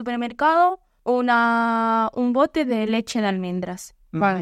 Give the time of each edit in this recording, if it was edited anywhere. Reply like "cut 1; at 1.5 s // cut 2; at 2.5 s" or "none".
none